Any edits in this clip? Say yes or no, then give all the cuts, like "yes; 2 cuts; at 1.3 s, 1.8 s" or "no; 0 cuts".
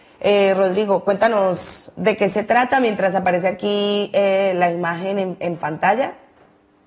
no; 0 cuts